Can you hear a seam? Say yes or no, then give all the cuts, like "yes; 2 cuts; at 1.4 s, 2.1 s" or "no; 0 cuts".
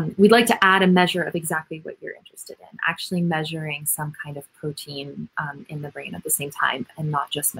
no; 0 cuts